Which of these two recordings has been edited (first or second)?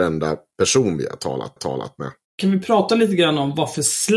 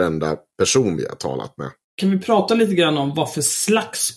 first